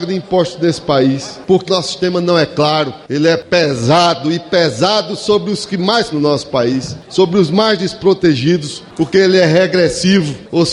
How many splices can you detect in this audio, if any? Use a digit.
2